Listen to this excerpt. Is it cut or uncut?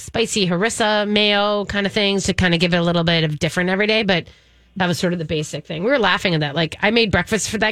cut